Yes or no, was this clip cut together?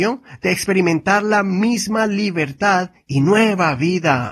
no